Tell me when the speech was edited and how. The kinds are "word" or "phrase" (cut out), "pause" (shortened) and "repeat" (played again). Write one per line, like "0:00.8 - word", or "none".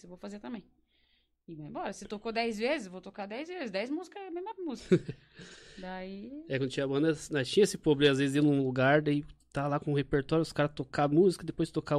none

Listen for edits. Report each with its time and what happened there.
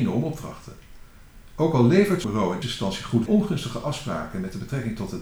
0:02.2 - word
0:02.6 - word
0:03.3 - phrase

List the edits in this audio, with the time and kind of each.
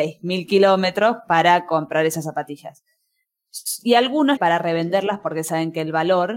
0:04.4 - phrase

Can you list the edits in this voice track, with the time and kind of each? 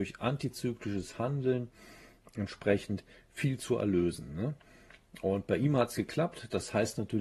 none

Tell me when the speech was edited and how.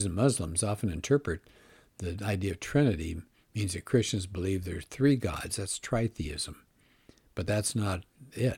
none

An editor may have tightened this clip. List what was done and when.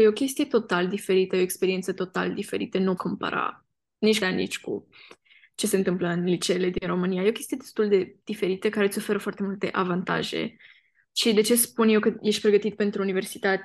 0:03.0 - word
0:04.2 - word

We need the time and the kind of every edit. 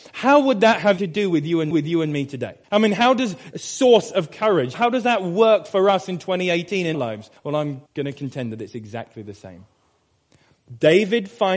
0:01.0 - word
0:01.7 - repeat
0:02.6 - pause
0:03.5 - word
0:04.7 - word
0:06.9 - word
0:07.4 - pause
0:07.9 - pause

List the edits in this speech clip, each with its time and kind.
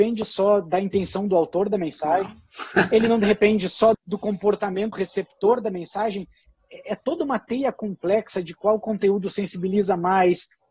0:03.9 - word
0:04.9 - word

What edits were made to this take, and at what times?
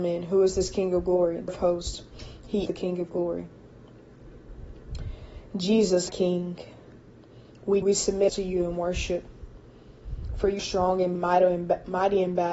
0:01.5 - word
0:02.7 - word
0:06.1 - word
0:07.8 - word
0:08.3 - word
0:10.6 - word
0:11.1 - word

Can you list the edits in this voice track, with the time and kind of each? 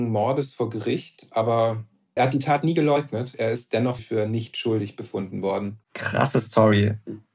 0:02.2 - phrase
0:04.0 - phrase
0:05.8 - pause

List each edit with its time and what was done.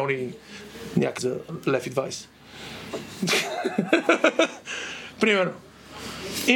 0:01.2 - word

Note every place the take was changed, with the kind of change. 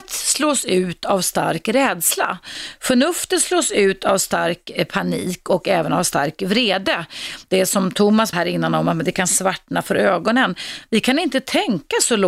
0:08.3 - word

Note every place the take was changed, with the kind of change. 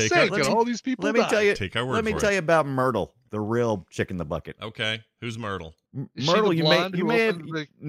0:05.8 - pause

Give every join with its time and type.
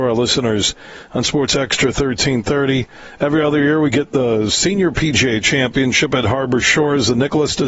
none

